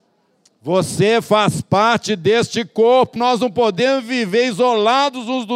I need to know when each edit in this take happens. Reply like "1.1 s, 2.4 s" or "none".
3.2 s